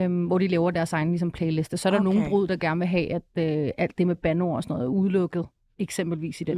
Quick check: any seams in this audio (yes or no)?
no